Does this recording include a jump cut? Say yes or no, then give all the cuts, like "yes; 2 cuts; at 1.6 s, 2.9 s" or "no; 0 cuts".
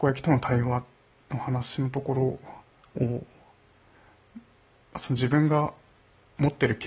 yes; 1 cut; at 2.7 s